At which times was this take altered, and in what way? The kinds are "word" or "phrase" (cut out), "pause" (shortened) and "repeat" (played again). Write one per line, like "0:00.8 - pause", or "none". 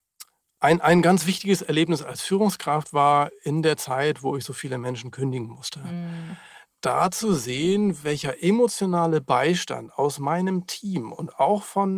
none